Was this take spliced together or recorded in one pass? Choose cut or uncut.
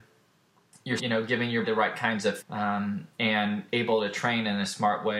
cut